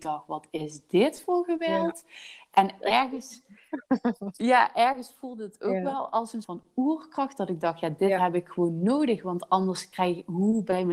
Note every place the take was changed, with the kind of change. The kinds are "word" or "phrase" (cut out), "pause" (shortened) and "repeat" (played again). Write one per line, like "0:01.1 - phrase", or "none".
0:06.4 - word